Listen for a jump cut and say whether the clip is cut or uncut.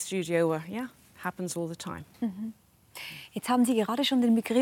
uncut